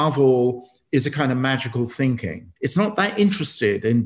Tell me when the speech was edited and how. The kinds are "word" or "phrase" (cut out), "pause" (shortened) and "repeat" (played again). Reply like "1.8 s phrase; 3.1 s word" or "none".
2.6 s pause